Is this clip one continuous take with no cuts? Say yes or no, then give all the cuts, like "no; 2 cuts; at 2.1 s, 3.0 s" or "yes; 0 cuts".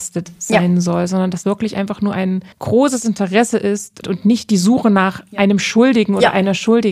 no; 3 cuts; at 1.4 s, 2.5 s, 4.0 s